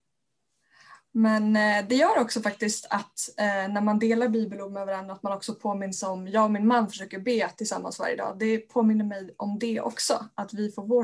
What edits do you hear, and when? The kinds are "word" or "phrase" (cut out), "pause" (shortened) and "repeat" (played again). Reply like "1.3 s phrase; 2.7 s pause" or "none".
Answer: none